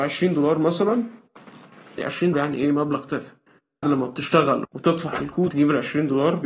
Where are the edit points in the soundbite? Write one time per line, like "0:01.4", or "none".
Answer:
0:02.0
0:02.3
0:03.8
0:04.6
0:05.5